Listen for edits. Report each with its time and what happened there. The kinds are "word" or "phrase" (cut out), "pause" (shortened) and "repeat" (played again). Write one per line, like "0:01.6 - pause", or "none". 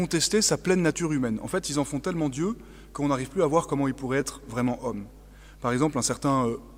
none